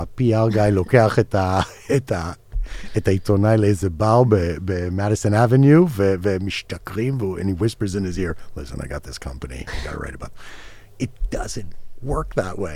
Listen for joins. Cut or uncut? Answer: uncut